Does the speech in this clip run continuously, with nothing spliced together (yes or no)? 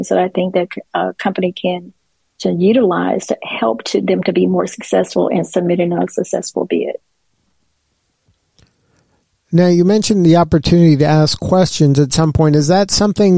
yes